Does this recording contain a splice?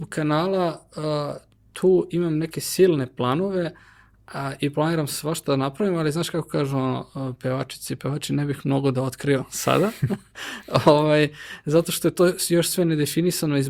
no; 0 cuts

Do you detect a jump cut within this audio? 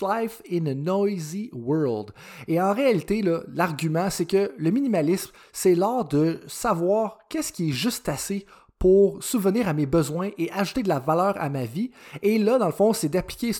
no; 0 cuts

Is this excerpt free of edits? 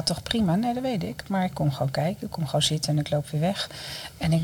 yes; 0 cuts

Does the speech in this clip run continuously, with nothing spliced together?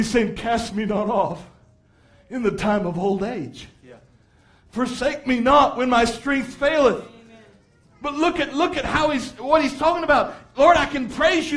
yes; 0 cuts

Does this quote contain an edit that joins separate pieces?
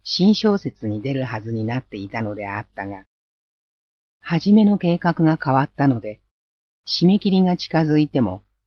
no; 0 cuts

